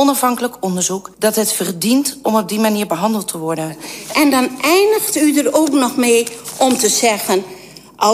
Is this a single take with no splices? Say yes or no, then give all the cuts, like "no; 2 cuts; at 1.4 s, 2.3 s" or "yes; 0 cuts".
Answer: no; 1 cut; at 1.1 s